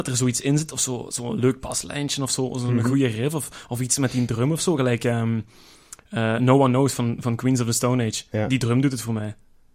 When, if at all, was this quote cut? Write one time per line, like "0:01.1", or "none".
none